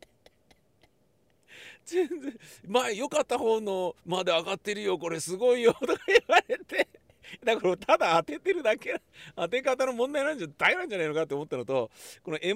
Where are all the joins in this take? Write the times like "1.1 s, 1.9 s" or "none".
4.0 s

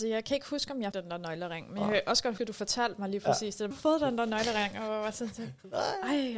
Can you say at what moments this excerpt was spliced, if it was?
0.9 s, 2.4 s, 3.7 s

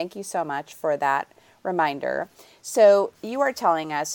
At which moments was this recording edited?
3.1 s

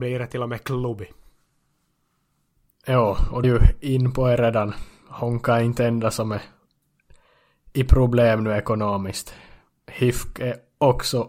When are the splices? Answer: 3.4 s

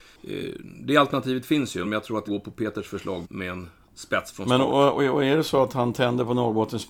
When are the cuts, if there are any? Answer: 1.8 s, 2.3 s, 3.2 s

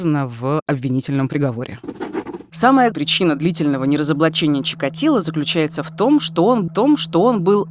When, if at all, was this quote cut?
2.9 s, 6.7 s

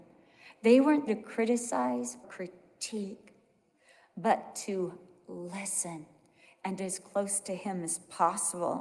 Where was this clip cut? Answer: 1.1 s, 2.2 s, 6.8 s

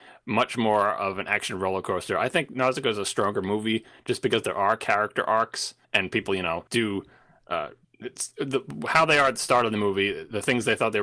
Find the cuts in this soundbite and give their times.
5.8 s, 6.7 s, 7.8 s

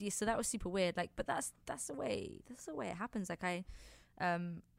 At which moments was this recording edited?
none

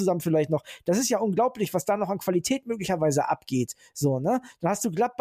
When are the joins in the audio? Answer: none

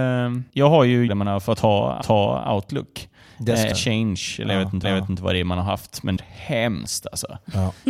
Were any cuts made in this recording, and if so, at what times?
1.1 s, 2.0 s, 3.7 s, 4.8 s, 6.2 s

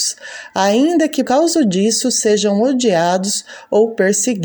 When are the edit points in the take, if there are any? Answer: 1.2 s

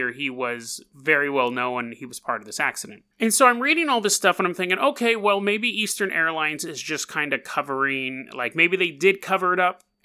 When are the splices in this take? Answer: 3.1 s

